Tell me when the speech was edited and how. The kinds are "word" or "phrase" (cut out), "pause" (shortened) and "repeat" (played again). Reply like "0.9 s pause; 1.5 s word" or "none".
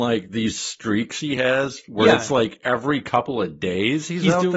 none